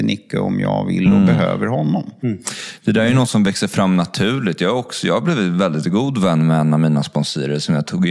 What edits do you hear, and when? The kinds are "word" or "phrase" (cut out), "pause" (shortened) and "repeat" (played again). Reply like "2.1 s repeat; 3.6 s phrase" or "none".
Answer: none